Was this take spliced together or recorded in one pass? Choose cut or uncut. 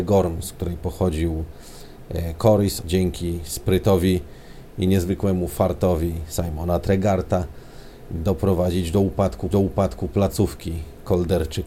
cut